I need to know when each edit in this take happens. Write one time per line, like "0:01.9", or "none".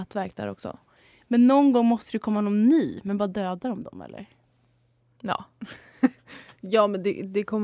none